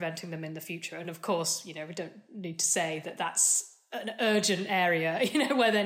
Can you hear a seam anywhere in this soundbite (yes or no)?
no